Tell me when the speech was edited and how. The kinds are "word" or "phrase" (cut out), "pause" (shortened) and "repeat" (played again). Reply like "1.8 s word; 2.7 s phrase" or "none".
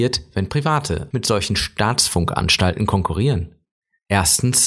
1.1 s phrase